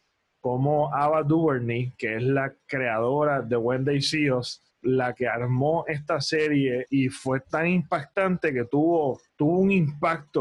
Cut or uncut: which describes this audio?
cut